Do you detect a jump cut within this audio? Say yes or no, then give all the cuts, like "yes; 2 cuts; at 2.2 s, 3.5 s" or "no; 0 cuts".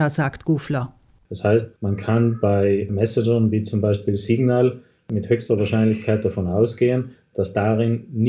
no; 0 cuts